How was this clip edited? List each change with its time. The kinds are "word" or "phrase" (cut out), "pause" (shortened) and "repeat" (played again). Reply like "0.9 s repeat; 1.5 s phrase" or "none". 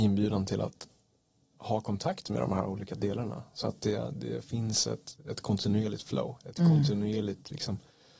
none